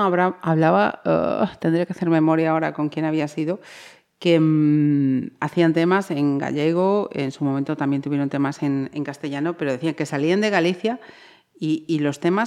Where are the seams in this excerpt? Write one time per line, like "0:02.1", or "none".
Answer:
none